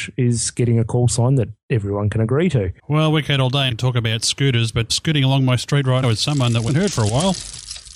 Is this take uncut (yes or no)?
no